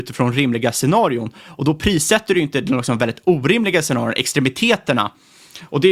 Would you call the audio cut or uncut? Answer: uncut